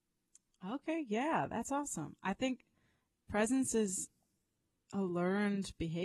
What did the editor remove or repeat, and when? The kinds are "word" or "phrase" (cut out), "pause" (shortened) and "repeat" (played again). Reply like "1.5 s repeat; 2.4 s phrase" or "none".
none